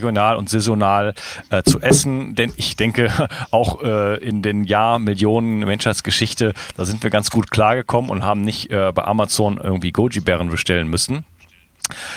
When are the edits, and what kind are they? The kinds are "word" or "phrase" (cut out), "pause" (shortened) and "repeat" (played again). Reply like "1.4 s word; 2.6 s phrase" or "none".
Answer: none